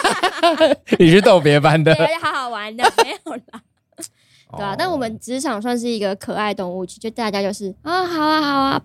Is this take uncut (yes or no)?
yes